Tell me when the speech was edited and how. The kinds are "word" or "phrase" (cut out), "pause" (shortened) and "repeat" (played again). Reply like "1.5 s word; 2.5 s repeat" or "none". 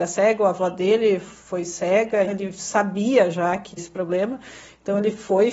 2.3 s word; 3.8 s word